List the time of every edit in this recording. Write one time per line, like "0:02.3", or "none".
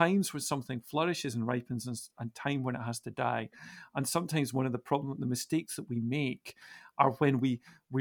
none